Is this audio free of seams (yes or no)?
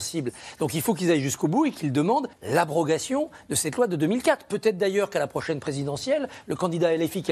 no